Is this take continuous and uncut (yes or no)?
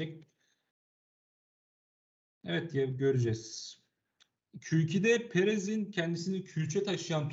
yes